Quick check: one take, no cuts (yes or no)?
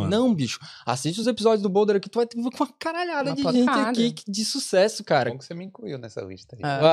yes